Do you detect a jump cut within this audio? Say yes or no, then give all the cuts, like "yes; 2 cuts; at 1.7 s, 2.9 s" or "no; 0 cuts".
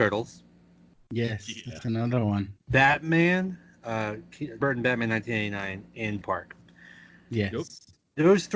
yes; 3 cuts; at 2.6 s, 4.6 s, 6.2 s